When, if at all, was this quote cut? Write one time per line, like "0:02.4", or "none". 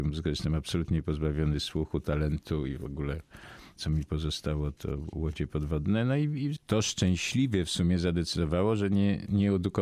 0:03.8
0:06.6